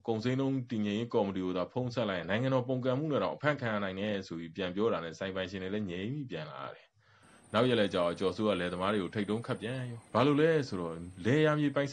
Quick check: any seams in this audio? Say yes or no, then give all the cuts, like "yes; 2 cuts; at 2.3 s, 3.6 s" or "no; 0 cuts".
yes; 1 cut; at 10.1 s